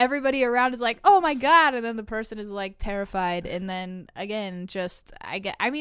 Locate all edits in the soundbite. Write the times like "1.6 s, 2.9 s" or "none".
none